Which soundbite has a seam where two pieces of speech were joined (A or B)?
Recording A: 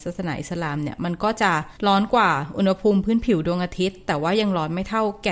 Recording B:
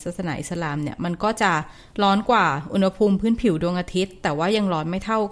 A